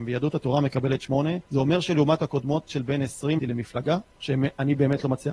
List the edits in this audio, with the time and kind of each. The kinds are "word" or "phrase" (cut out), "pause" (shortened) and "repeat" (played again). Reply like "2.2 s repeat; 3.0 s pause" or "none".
1.5 s pause; 2.2 s word; 2.7 s word; 3.4 s phrase; 4.1 s pause